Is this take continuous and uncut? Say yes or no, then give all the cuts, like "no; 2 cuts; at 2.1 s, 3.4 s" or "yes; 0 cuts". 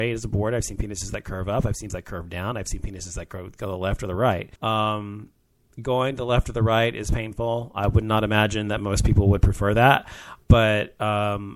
no; 2 cuts; at 1.9 s, 4.6 s